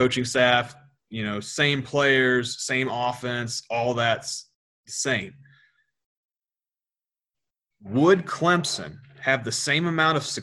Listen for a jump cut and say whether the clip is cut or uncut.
uncut